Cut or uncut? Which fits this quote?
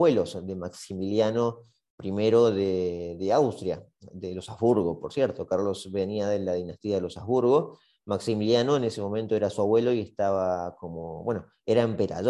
uncut